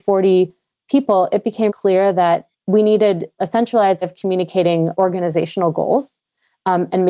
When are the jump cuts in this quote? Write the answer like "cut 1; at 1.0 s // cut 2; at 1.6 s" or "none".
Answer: cut 1; at 1.7 s // cut 2; at 2.5 s // cut 3; at 3.4 s // cut 4; at 4.0 s // cut 5; at 4.9 s